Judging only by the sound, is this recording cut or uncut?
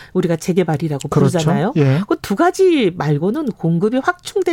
uncut